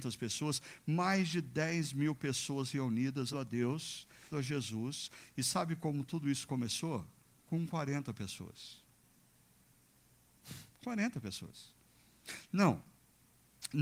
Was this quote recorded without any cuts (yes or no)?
no